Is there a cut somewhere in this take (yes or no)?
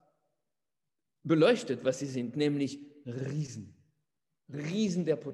no